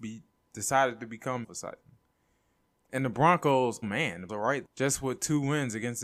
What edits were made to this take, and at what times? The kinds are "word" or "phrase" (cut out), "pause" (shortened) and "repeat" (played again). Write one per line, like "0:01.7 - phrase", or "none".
0:01.4 - phrase
0:03.8 - word
0:04.3 - word
0:04.6 - word